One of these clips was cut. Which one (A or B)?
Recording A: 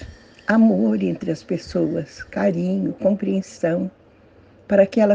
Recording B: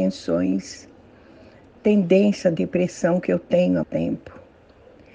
B